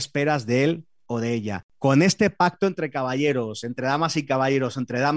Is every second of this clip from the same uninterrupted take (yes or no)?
yes